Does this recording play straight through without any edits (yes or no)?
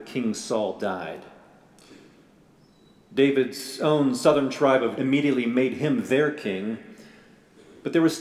no